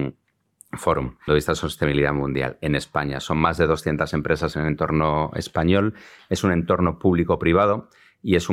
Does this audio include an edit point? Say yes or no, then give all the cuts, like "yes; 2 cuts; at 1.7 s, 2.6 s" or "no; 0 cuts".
yes; 1 cut; at 1.3 s